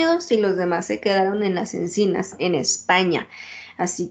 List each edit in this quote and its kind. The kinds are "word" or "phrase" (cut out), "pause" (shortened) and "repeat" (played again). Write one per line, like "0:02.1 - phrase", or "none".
none